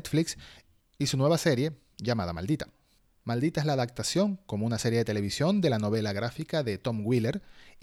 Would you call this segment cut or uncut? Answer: uncut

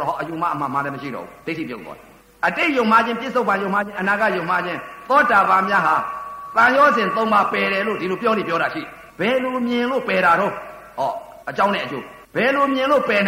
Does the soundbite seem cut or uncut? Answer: cut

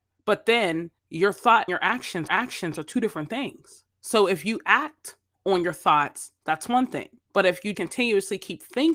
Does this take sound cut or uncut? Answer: cut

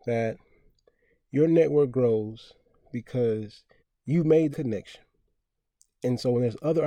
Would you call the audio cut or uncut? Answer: cut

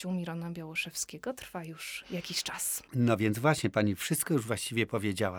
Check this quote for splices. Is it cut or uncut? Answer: uncut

